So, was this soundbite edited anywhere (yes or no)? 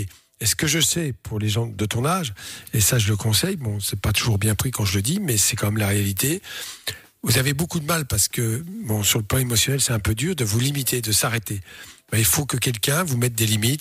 no